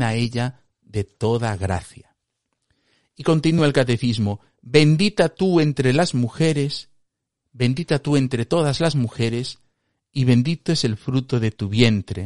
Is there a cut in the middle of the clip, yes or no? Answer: no